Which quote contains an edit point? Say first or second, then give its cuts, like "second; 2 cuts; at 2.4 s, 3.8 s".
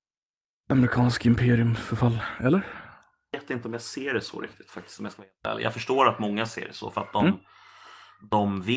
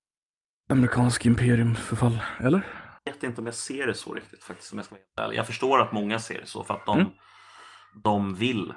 second; 1 cut; at 3.0 s